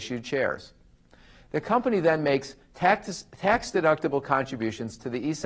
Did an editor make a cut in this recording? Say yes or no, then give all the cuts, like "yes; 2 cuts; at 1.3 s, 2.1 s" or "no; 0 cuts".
no; 0 cuts